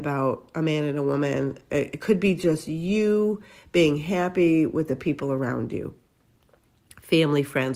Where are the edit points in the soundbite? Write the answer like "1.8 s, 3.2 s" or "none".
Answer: none